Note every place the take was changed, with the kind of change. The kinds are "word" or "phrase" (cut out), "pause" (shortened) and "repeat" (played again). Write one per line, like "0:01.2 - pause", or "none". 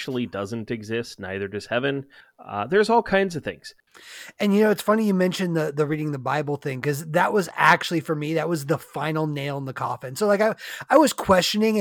0:02.2 - pause